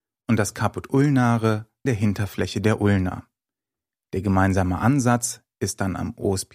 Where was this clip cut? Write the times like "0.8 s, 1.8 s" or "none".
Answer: 1.9 s